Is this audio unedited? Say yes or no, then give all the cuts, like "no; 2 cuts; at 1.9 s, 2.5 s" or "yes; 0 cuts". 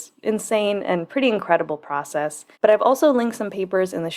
no; 1 cut; at 2.5 s